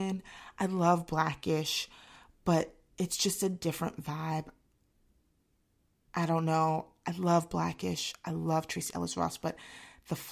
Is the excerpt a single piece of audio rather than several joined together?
yes; 0 cuts

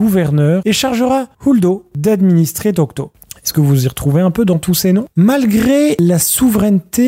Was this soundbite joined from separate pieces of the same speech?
no; 0 cuts

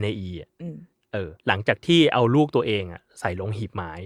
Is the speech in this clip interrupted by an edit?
yes; 1 cut; at 1.4 s

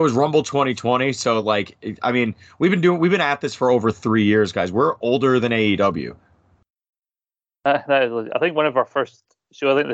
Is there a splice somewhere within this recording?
no; 0 cuts

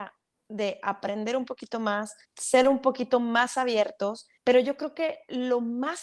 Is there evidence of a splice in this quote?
yes; 2 cuts; at 2.2 s, 4.4 s

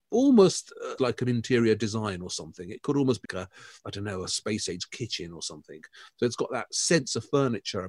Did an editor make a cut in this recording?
yes; 2 cuts; at 1.0 s, 3.2 s

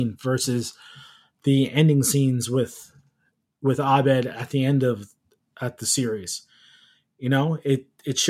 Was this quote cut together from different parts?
no; 0 cuts

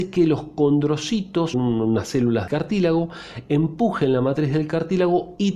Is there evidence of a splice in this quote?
yes; 2 cuts; at 1.5 s, 2.5 s

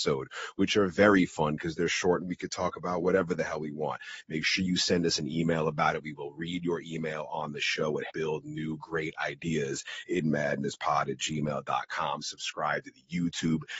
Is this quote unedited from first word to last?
no; 1 cut; at 8.1 s

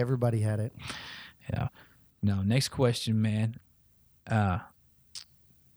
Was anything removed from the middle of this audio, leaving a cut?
no; 0 cuts

